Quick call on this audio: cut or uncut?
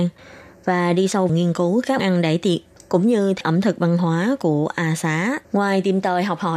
cut